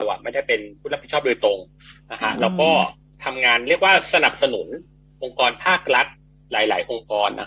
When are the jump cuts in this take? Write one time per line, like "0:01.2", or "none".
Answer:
none